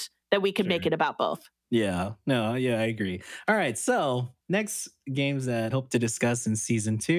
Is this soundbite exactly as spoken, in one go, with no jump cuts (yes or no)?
no